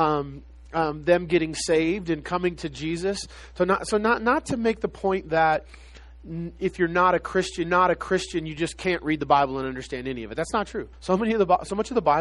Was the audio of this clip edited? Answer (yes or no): yes